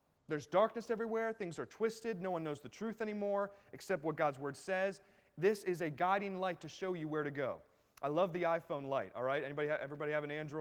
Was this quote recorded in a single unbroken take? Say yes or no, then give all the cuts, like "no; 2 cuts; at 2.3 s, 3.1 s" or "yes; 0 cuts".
yes; 0 cuts